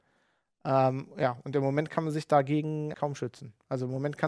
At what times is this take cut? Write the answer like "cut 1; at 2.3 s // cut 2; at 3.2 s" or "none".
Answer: cut 1; at 2.9 s